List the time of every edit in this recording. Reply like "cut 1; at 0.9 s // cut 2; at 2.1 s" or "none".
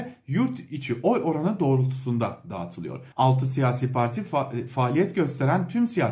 cut 1; at 3.1 s

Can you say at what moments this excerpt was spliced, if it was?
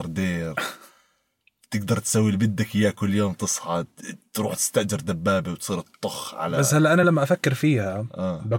none

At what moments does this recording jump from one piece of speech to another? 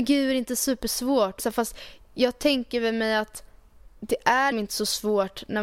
cut 1; at 1.4 s // cut 2; at 4.0 s // cut 3; at 4.5 s

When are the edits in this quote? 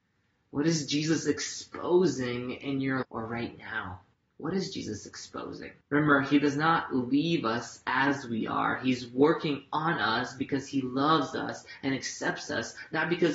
cut 1; at 3.0 s // cut 2; at 4.1 s // cut 3; at 5.8 s

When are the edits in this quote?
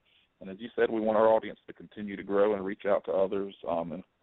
none

